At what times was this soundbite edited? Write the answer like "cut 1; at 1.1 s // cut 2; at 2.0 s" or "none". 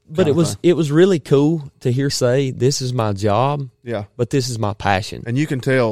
cut 1; at 2.1 s